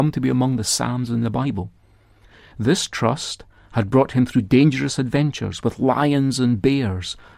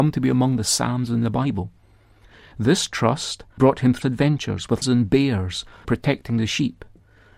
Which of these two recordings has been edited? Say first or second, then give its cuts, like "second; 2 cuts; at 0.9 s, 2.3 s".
second; 4 cuts; at 3.6 s, 4.0 s, 4.8 s, 5.8 s